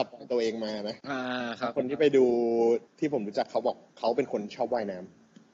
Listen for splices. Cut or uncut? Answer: cut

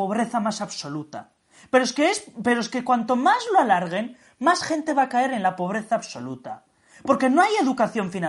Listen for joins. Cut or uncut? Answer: uncut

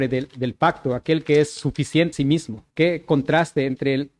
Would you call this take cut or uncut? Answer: cut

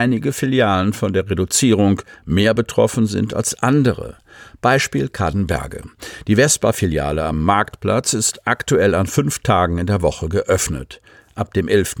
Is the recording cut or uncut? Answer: uncut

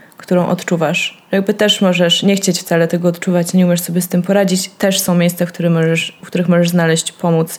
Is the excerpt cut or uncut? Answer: uncut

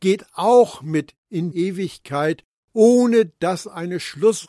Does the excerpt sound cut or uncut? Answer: cut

